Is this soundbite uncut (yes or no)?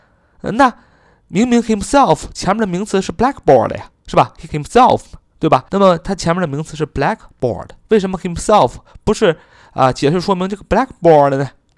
no